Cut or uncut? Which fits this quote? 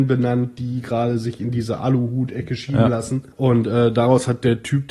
cut